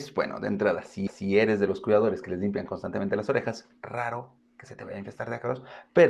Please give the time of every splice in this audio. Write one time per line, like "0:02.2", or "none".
0:01.1
0:03.8